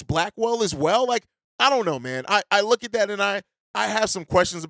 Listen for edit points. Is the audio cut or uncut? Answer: uncut